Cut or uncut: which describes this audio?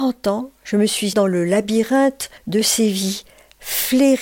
cut